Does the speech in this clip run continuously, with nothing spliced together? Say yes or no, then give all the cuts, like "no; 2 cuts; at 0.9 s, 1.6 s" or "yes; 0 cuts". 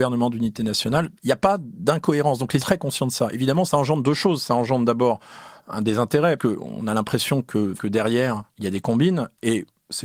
no; 5 cuts; at 1.1 s, 2.6 s, 3.7 s, 6.4 s, 7.8 s